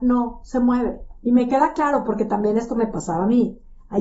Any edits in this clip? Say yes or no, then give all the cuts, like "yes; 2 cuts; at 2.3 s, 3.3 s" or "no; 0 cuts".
no; 0 cuts